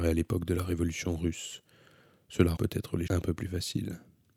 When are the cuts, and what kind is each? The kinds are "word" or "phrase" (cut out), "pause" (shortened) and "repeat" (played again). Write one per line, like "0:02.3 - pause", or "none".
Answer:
0:02.6 - word
0:03.1 - word